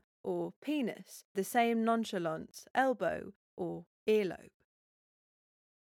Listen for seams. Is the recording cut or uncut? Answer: cut